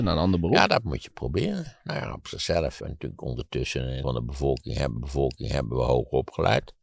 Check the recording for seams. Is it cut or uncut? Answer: cut